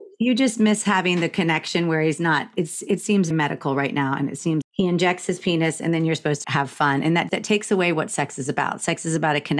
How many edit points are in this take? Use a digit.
4